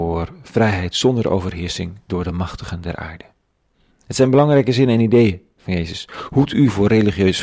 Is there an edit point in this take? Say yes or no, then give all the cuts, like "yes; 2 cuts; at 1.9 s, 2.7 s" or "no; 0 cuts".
no; 0 cuts